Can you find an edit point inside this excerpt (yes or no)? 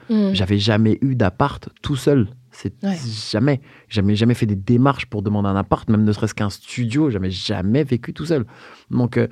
no